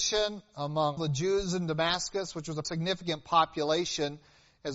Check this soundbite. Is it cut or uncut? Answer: cut